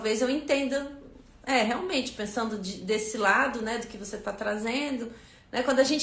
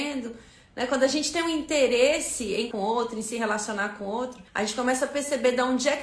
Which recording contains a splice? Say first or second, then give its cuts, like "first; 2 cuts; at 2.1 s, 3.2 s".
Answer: second; 2 cuts; at 2.7 s, 4.5 s